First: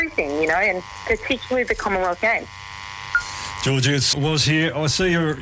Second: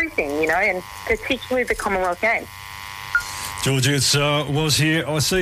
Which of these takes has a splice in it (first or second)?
first